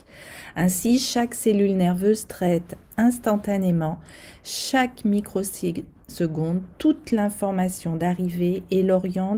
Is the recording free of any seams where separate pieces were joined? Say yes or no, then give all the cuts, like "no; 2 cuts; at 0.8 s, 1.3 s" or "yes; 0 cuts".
yes; 0 cuts